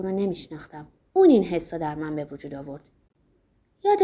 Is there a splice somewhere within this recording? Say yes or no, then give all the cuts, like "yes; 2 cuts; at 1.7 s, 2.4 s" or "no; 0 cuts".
yes; 1 cut; at 1.1 s